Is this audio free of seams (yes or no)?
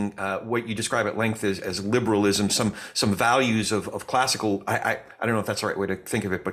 yes